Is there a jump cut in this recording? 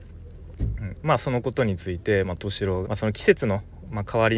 yes; 1 cut; at 2.8 s

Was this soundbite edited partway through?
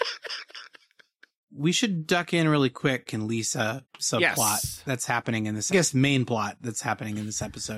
yes; 3 cuts; at 3.1 s, 3.9 s, 5.7 s

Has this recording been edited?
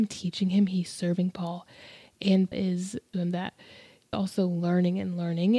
yes; 3 cuts; at 2.5 s, 3.1 s, 4.1 s

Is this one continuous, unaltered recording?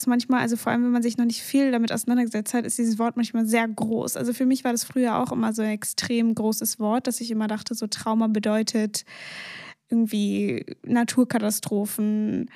yes; 0 cuts

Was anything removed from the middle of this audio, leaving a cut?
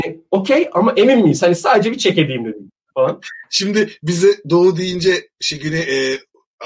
no; 0 cuts

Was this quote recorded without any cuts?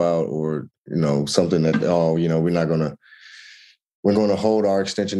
no; 1 cut; at 4.1 s

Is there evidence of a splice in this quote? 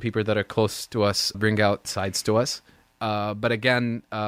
yes; 2 cuts; at 1.3 s, 1.8 s

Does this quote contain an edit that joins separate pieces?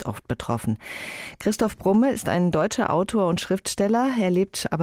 no; 0 cuts

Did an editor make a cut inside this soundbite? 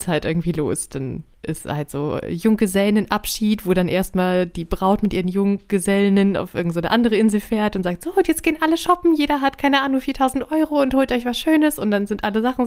no; 0 cuts

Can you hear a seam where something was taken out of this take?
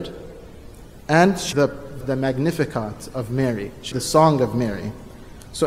yes; 3 cuts; at 1.5 s, 2.0 s, 3.9 s

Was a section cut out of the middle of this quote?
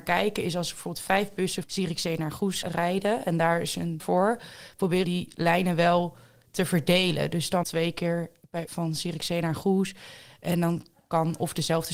yes; 6 cuts; at 1.6 s, 2.6 s, 4.0 s, 5.0 s, 7.6 s, 8.7 s

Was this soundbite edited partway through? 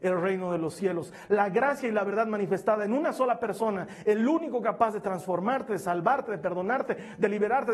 no; 0 cuts

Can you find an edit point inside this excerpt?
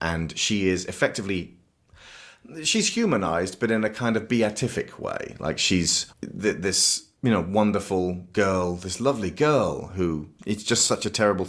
yes; 1 cut; at 6.1 s

